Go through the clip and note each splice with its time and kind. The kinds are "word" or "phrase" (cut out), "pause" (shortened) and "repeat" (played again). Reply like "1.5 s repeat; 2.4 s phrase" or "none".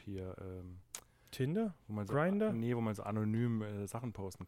none